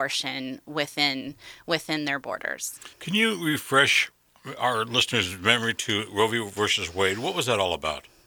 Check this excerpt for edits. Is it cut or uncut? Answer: cut